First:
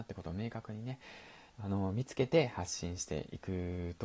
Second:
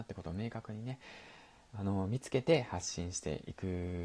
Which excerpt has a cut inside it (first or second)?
first